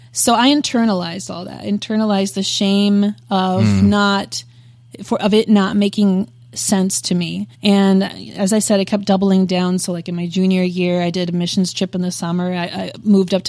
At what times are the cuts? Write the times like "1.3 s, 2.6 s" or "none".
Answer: 7.5 s